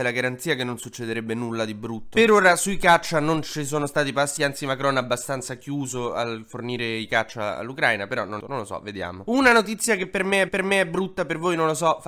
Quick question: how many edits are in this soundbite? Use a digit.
3